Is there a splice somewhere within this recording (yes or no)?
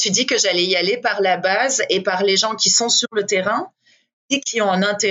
no